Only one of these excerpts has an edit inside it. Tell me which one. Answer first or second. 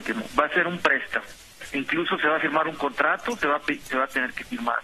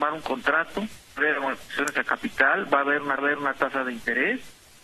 second